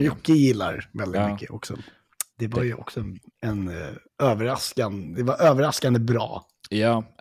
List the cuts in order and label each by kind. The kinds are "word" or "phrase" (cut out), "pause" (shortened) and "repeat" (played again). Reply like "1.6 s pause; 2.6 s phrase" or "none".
2.3 s pause; 3.3 s pause; 4.1 s pause